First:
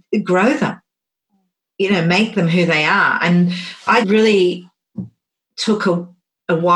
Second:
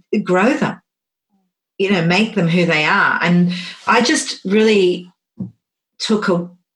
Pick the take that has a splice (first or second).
first